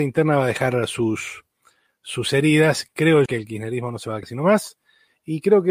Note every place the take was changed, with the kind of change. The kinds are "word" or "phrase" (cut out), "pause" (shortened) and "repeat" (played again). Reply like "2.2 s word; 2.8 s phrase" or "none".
3.3 s word; 4.2 s word

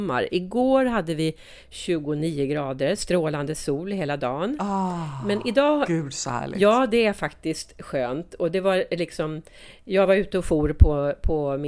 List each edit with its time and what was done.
none

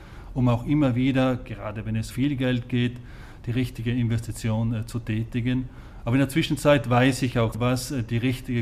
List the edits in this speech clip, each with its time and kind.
2.1 s word; 7.5 s word

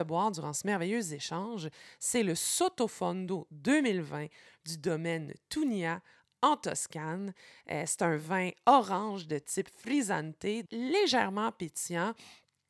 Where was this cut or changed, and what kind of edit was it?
10.7 s word

